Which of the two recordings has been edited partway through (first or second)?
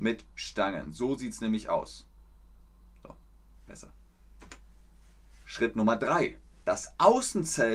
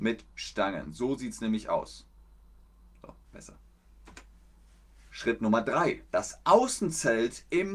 second